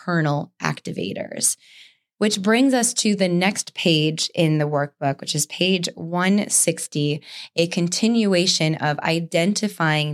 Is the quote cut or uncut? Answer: uncut